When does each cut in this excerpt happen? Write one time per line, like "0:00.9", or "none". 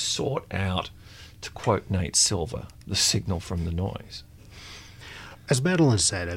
none